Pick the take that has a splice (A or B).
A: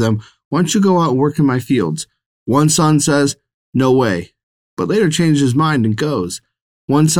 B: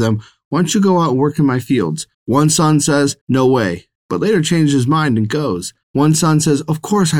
B